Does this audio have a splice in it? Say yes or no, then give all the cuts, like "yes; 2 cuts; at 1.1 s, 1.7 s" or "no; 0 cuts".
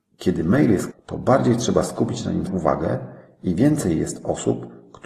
yes; 2 cuts; at 0.9 s, 2.5 s